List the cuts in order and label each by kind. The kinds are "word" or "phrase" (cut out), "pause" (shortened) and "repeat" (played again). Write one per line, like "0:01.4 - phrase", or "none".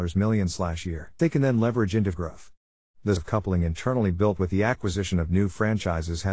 0:01.2 - word
0:02.1 - word
0:03.2 - word
0:04.4 - word